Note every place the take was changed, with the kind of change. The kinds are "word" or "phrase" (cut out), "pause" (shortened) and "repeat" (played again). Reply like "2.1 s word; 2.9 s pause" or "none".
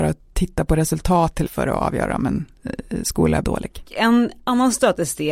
1.5 s word; 3.4 s phrase